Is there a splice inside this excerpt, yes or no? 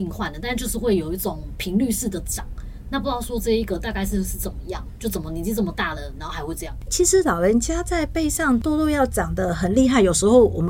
yes